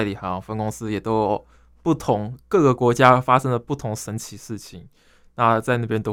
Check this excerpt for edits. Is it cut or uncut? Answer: uncut